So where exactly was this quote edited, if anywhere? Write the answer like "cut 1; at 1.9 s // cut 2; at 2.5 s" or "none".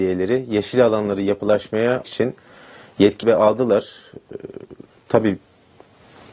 cut 1; at 2.0 s // cut 2; at 3.2 s